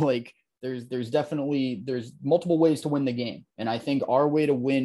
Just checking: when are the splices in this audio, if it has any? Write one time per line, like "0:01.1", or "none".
0:03.5